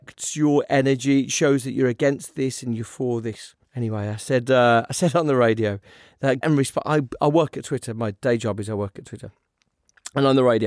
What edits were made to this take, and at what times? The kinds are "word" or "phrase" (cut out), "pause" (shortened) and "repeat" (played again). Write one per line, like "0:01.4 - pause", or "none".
0:03.6 - pause
0:06.4 - word